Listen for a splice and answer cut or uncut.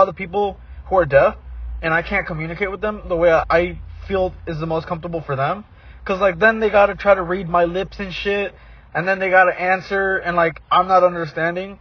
uncut